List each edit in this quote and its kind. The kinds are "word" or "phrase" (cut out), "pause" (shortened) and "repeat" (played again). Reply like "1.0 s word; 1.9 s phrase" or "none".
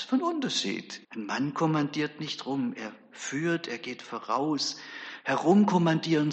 1.0 s pause